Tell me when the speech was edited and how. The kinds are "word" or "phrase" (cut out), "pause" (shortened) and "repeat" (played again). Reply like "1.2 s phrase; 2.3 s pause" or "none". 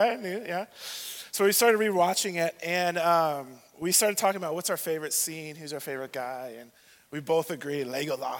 none